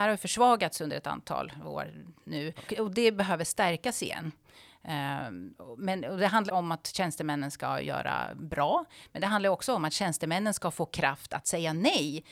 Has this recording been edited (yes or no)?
yes